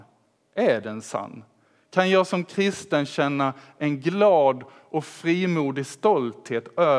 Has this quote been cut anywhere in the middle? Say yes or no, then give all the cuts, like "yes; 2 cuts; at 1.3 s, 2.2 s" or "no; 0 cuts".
no; 0 cuts